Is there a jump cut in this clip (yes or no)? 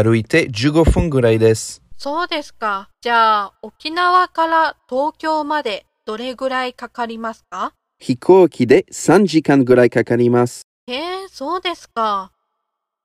yes